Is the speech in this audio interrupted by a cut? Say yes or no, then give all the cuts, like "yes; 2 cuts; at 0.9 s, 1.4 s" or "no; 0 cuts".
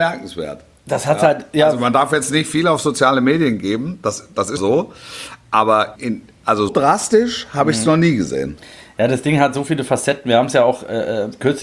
yes; 3 cuts; at 4.6 s, 6.0 s, 6.7 s